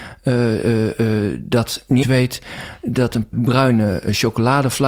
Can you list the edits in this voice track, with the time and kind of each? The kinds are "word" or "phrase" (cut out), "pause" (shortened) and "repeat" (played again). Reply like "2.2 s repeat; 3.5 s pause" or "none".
2.0 s word; 3.3 s word

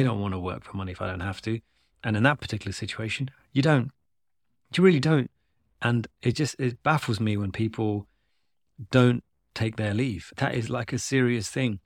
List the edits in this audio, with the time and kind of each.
none

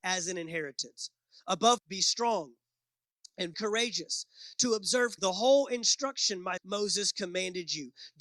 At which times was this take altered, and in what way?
1.8 s word; 3.5 s word; 5.2 s word; 6.6 s word

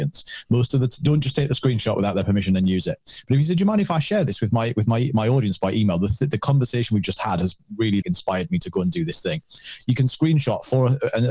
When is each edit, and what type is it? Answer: 8.0 s word

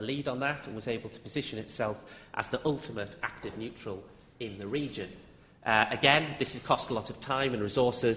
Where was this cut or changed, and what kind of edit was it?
none

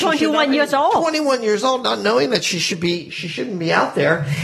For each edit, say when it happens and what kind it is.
none

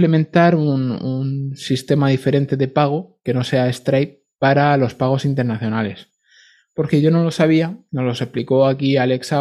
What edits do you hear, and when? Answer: none

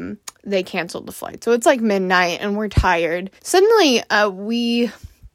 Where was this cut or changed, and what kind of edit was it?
3.4 s pause

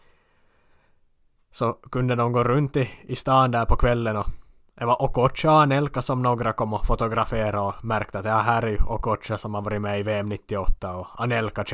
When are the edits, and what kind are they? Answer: none

